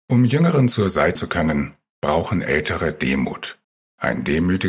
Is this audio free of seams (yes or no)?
no